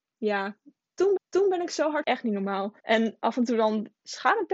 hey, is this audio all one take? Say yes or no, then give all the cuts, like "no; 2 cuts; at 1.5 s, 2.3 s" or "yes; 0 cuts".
no; 3 cuts; at 1.2 s, 2.0 s, 2.8 s